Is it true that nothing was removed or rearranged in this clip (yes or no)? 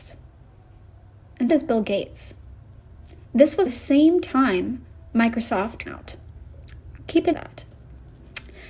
no